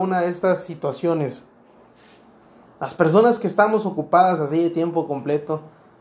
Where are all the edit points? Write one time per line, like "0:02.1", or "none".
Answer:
none

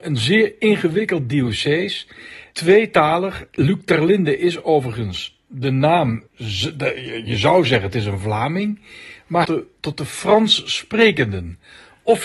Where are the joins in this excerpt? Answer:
0:06.3
0:09.4

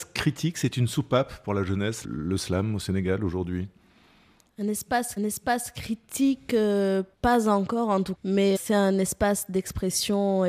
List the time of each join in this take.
0:02.0
0:05.2
0:07.1
0:08.1
0:08.6

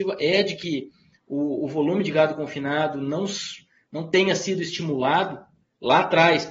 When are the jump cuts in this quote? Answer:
none

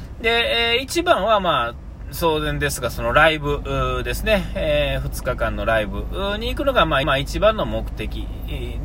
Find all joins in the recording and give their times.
0:07.0

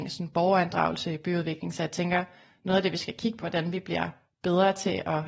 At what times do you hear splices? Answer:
0:03.4

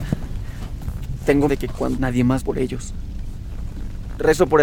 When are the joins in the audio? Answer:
0:01.5
0:02.0
0:02.4

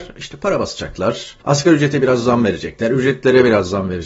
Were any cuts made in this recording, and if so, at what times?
0:01.4

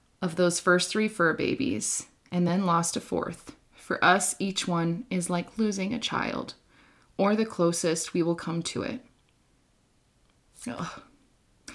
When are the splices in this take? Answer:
none

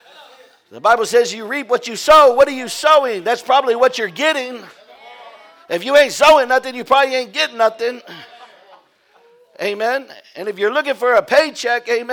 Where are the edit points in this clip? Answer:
none

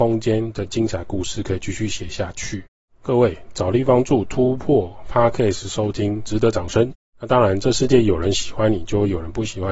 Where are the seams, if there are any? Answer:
none

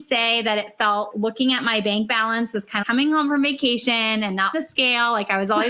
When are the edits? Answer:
0:01.1
0:02.8
0:04.5

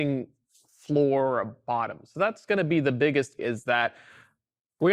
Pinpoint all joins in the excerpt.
0:03.4

